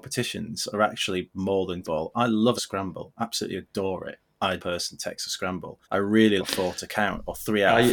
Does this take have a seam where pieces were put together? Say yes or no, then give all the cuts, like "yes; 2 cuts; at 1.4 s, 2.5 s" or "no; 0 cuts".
yes; 5 cuts; at 1.8 s, 2.6 s, 4.6 s, 5.8 s, 6.4 s